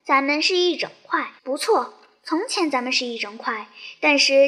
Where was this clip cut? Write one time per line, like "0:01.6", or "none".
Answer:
0:01.4